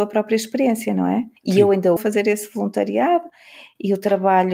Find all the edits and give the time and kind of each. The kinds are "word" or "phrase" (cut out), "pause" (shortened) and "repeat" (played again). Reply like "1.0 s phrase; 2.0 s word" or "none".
1.4 s pause; 2.0 s phrase